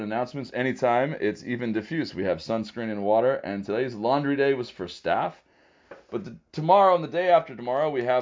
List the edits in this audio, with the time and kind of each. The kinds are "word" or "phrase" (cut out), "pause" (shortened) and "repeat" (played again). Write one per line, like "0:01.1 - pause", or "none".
none